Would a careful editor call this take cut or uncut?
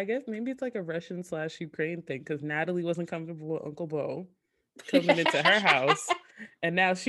uncut